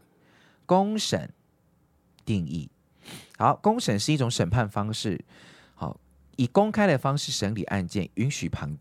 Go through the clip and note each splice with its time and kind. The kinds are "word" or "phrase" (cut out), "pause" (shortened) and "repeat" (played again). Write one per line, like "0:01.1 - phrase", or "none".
none